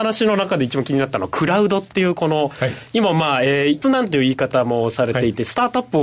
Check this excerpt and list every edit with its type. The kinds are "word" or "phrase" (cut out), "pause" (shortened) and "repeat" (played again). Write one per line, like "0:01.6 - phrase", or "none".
0:03.8 - word